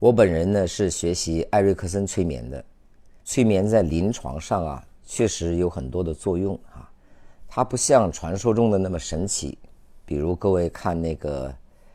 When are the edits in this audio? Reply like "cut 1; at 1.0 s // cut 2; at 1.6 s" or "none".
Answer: cut 1; at 3.2 s